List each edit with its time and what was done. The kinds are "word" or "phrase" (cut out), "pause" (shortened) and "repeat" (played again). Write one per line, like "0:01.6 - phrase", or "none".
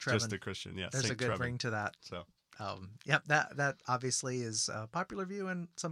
none